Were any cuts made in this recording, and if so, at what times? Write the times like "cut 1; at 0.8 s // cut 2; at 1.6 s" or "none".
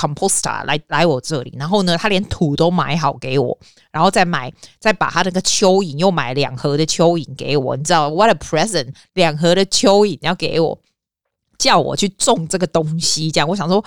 none